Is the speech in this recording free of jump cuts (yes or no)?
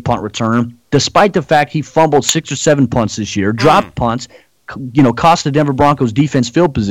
yes